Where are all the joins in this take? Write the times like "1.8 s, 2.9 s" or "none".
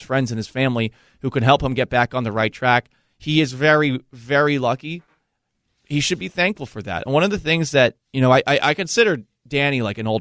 8.0 s